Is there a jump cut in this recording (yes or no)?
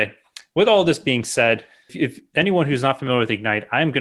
no